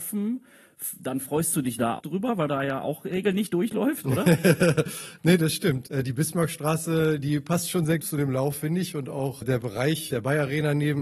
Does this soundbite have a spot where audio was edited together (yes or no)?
yes